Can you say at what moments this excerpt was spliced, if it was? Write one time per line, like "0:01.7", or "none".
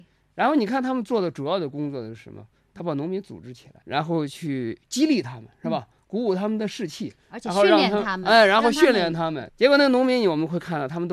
none